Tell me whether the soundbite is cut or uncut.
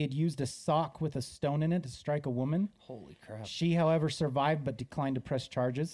uncut